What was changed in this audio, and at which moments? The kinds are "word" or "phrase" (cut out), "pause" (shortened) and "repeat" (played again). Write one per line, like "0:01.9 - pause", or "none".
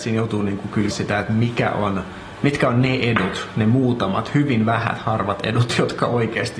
0:00.9 - word